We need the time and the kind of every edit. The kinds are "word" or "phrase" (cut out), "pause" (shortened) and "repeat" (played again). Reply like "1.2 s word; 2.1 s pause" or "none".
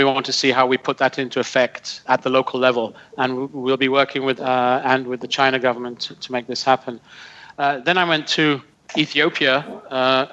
2.0 s word; 4.4 s phrase